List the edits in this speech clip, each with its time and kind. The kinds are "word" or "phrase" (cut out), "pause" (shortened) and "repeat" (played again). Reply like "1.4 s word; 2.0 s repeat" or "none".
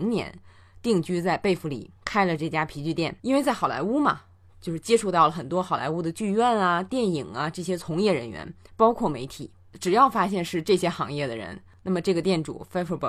2.0 s pause; 3.2 s pause